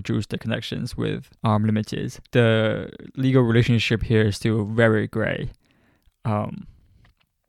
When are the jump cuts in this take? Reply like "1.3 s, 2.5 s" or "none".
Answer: 1.4 s, 2.3 s